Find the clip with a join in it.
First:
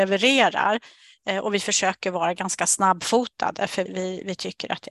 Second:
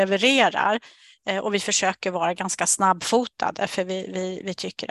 first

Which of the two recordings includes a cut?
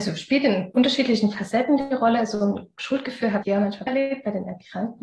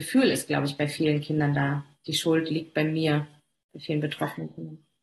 first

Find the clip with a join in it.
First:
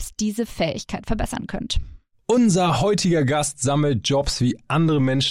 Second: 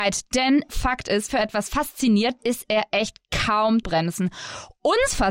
second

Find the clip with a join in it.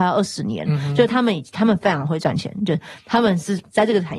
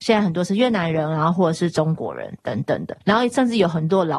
second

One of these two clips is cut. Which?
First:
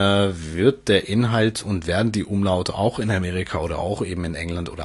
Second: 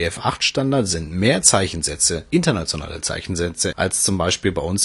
second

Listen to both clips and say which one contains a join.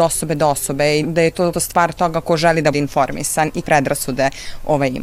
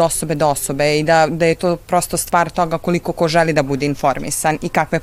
first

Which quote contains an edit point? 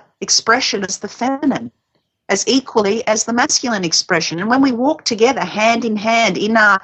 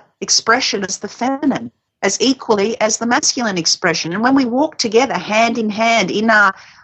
second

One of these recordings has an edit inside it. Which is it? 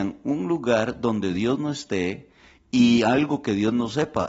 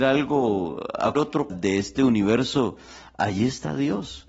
second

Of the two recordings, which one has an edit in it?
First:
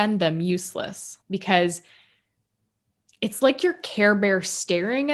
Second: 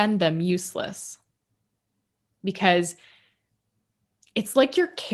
first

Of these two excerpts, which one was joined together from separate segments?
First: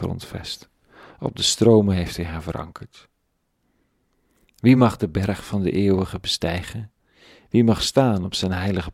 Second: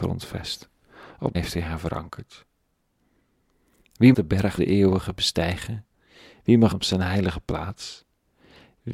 second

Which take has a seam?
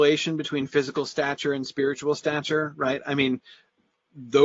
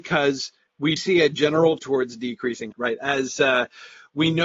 second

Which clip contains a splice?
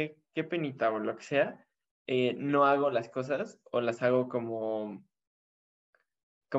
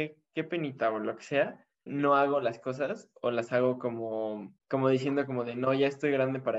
second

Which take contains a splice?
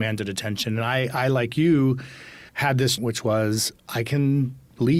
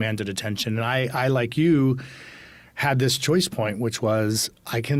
first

